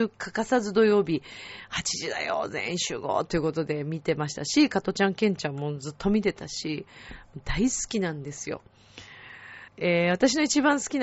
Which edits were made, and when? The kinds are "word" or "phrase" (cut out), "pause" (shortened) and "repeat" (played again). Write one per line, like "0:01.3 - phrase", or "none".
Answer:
0:09.7 - pause

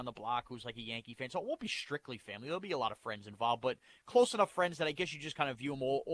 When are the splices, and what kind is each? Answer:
none

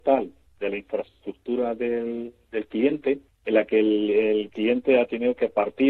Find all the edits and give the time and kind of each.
0:03.3 - pause

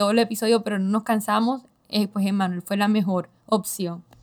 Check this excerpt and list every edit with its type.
none

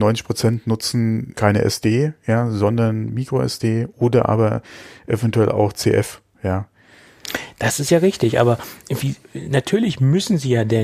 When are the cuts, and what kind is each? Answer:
0:01.3 - word

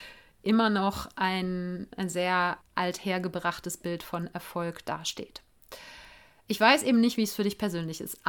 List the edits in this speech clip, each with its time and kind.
0:02.6 - pause

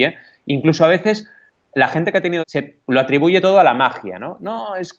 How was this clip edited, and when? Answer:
0:02.4 - word

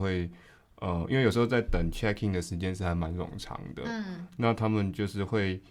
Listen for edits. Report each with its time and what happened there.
none

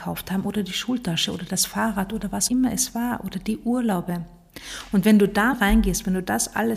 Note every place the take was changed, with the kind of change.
0:02.5 - word
0:05.5 - word

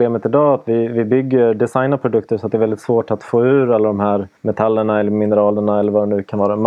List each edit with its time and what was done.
0:04.4 - pause

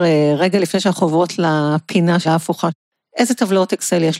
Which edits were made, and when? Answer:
0:02.2 - word

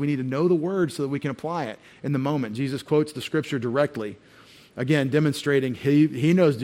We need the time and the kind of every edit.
none

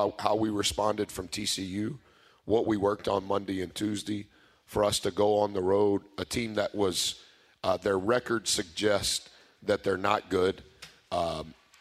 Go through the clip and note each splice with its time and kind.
none

